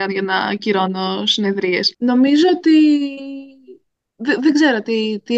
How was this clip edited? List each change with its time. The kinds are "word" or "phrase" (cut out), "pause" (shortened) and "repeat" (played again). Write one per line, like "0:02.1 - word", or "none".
none